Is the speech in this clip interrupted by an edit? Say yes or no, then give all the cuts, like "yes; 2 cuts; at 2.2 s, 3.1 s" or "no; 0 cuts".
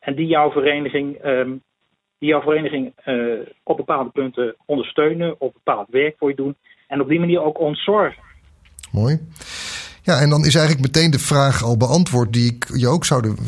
no; 0 cuts